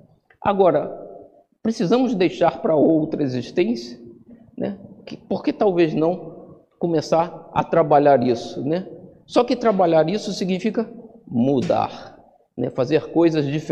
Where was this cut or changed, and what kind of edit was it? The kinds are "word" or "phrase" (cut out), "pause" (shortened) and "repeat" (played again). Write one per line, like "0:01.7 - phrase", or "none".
none

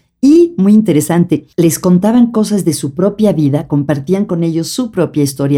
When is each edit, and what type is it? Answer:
0:01.5 - pause

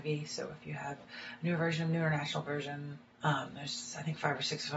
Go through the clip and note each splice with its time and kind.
0:03.1 - pause

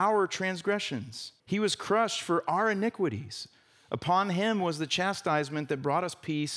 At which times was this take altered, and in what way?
0:01.4 - pause

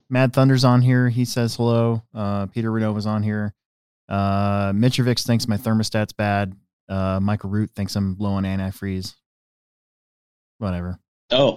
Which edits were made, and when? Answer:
none

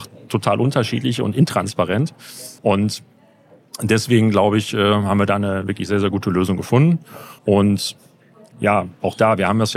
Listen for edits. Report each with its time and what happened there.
0:02.6 - pause
0:07.4 - pause

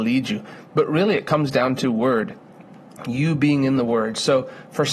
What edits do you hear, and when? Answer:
none

